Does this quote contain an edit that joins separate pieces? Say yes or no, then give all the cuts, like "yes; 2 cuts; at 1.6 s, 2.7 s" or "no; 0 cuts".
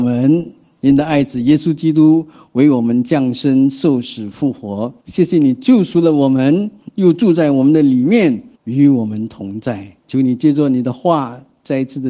yes; 3 cuts; at 5.0 s, 8.5 s, 10.0 s